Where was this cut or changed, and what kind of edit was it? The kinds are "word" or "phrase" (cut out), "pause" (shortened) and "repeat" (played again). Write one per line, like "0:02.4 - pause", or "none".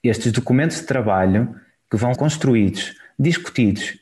0:02.1 - word